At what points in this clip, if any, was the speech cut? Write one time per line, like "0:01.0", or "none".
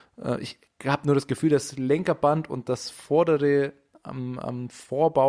none